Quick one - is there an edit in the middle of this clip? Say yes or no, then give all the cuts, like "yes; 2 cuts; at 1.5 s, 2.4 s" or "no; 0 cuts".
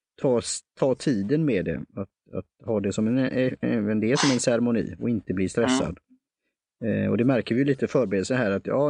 no; 0 cuts